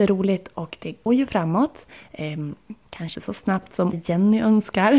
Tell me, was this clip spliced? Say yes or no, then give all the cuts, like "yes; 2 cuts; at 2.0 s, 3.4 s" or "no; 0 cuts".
yes; 3 cuts; at 1.1 s, 3.1 s, 3.9 s